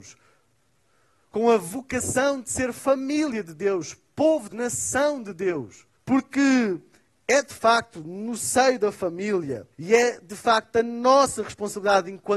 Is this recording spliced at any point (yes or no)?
yes